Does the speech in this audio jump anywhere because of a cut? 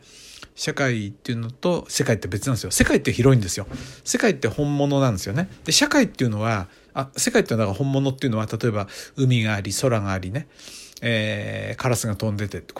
no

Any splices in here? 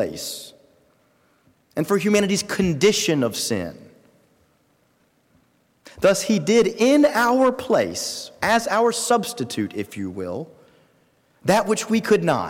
no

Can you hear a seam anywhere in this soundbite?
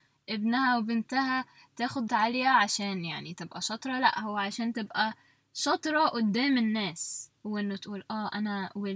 yes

